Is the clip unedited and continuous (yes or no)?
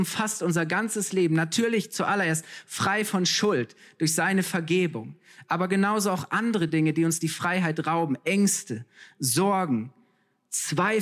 yes